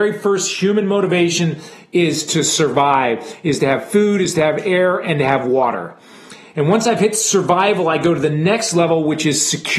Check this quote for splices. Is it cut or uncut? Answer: uncut